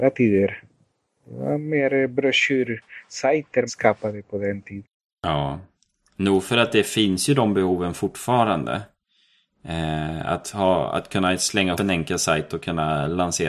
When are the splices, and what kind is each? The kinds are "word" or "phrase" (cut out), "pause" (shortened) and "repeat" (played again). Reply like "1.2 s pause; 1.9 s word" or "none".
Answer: 3.7 s word; 11.7 s word